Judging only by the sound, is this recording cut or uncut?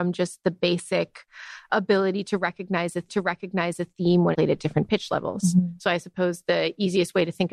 cut